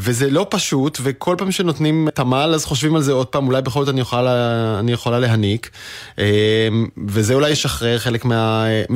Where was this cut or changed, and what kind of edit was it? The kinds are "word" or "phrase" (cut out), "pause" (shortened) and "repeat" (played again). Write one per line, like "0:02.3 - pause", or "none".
0:02.1 - word